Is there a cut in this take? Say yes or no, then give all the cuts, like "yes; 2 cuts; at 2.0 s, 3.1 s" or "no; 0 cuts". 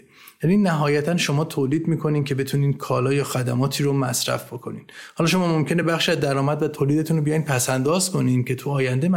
no; 0 cuts